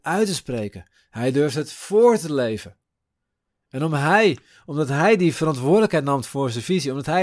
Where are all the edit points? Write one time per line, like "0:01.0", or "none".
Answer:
none